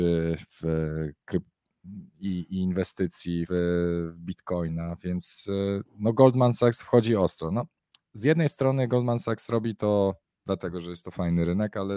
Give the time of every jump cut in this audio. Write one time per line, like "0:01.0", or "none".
0:03.5